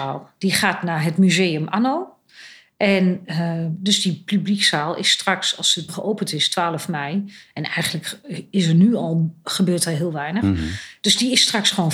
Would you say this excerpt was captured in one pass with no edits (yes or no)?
no